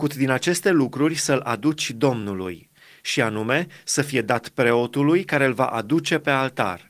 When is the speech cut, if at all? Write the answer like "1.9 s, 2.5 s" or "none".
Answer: none